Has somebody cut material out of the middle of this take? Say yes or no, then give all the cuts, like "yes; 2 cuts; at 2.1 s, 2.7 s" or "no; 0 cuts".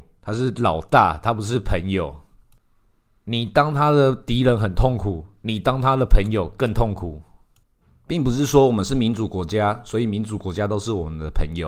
no; 0 cuts